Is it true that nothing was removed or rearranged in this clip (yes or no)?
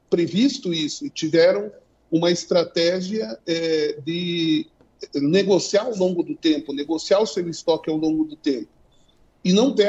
yes